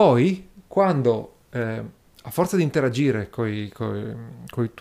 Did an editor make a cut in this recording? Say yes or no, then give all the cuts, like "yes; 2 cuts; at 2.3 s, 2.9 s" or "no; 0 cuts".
no; 0 cuts